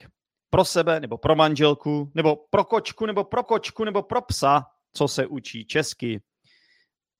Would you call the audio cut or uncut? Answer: cut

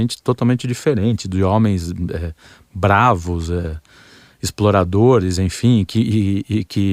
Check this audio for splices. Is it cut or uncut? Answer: uncut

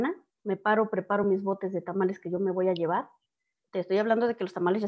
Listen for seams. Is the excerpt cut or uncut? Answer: uncut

